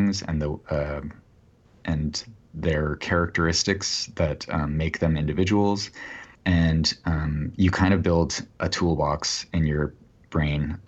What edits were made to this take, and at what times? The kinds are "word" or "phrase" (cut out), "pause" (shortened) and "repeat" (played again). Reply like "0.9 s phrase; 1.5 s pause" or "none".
6.3 s pause